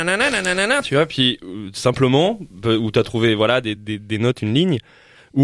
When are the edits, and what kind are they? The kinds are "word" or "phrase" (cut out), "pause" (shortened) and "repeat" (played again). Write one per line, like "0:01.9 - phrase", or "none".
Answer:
none